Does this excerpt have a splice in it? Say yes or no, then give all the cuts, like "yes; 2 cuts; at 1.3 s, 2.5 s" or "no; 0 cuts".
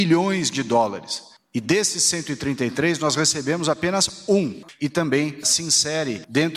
no; 0 cuts